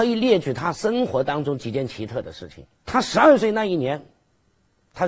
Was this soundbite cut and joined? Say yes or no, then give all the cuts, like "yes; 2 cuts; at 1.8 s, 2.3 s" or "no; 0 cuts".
yes; 1 cut; at 2.7 s